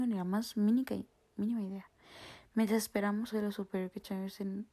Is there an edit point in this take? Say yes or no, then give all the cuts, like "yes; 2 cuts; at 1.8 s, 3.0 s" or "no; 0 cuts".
yes; 1 cut; at 3.3 s